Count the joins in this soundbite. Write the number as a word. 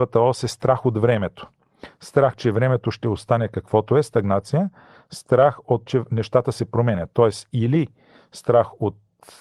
one